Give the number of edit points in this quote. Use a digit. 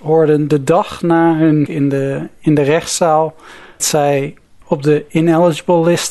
3